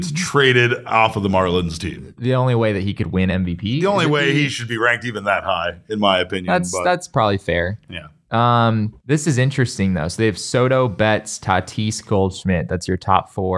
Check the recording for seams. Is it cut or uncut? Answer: cut